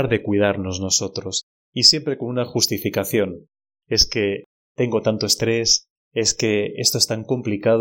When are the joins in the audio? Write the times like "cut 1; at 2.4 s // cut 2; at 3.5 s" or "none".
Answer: none